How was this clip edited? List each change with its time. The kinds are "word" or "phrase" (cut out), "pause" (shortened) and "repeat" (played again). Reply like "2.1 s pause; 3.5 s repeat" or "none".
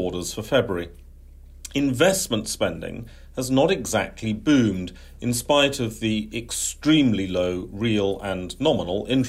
none